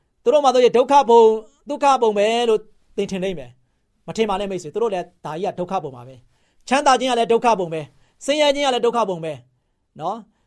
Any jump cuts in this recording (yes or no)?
no